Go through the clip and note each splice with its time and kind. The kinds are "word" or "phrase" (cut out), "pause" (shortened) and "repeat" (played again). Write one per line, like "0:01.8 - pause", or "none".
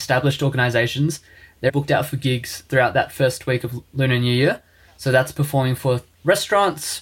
0:01.7 - word